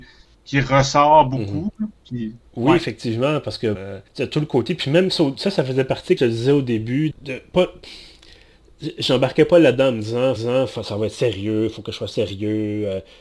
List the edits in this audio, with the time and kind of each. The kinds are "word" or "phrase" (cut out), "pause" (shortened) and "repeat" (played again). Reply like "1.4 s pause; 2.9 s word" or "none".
2.0 s pause; 3.8 s word; 4.1 s pause; 6.2 s phrase; 7.1 s word; 10.4 s repeat

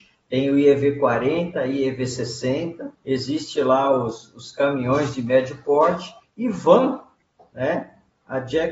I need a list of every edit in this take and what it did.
2.9 s pause

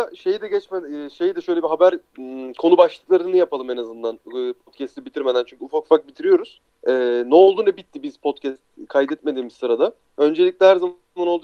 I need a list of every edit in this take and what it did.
2.1 s pause; 6.7 s pause; 10.0 s pause

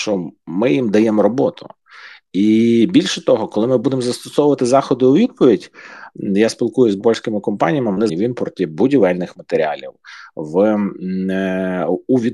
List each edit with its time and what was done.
7.0 s word; 8.1 s word

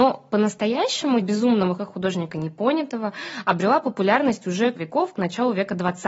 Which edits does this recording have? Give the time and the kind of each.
1.2 s word; 1.8 s word; 4.8 s word

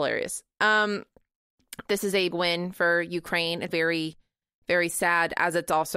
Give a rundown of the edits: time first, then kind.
1.9 s word; 2.3 s word; 3.7 s word

